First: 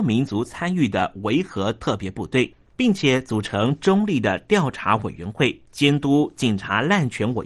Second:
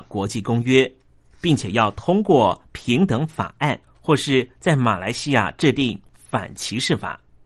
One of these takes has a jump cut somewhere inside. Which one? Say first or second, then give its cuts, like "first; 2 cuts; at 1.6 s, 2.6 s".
first; 1 cut; at 5.7 s